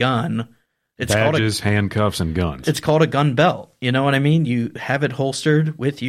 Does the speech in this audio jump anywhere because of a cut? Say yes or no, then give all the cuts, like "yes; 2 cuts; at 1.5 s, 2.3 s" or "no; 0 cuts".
no; 0 cuts